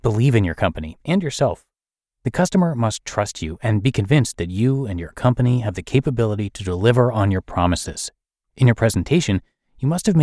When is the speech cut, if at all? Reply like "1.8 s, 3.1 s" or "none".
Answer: none